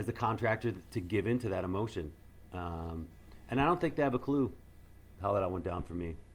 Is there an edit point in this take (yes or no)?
no